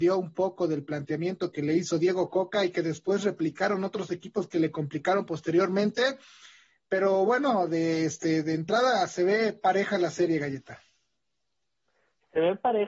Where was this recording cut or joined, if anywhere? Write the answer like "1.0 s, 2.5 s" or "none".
none